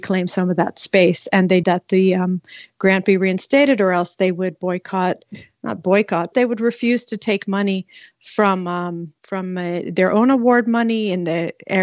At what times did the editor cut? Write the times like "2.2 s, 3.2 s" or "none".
1.6 s, 6.3 s, 9.2 s